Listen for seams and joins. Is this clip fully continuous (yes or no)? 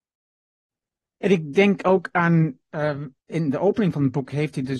no